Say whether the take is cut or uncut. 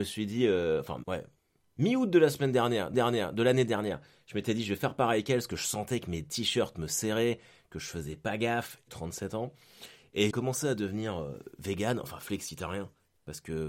cut